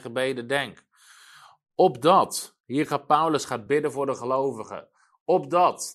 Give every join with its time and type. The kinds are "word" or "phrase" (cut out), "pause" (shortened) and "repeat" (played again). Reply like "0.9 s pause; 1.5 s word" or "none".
none